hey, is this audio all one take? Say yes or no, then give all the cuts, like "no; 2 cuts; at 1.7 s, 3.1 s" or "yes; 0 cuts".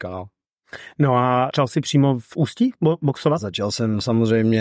yes; 0 cuts